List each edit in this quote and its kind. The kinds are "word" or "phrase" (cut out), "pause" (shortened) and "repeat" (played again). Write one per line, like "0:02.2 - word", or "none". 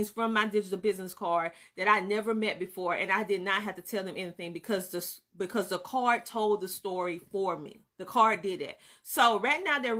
0:07.9 - pause